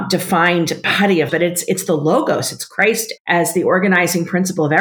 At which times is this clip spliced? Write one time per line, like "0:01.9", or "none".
0:01.3
0:03.2